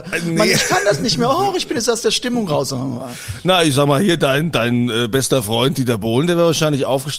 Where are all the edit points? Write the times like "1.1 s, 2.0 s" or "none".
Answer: none